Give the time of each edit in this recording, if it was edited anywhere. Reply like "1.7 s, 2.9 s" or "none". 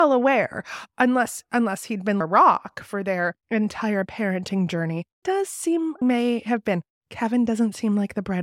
2.2 s, 3.4 s, 5.2 s, 6.0 s